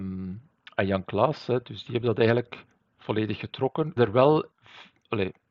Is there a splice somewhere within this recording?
yes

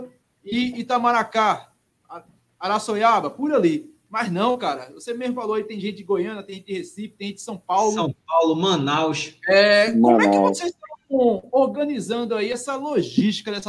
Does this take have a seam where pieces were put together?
no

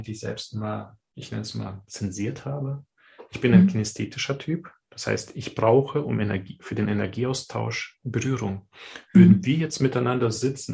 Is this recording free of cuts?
no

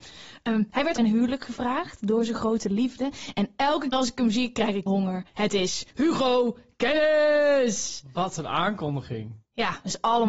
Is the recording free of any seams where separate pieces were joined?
no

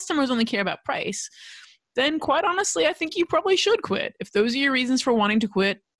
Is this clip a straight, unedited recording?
yes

